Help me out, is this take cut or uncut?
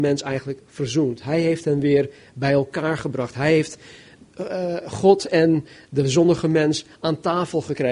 uncut